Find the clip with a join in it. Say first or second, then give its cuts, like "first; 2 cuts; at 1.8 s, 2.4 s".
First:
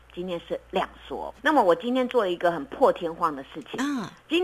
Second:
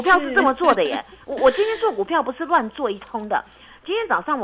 first; 1 cut; at 1.4 s